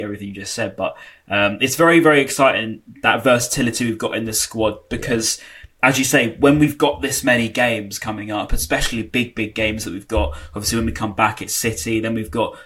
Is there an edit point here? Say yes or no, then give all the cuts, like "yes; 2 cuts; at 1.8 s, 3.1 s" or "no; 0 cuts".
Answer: no; 0 cuts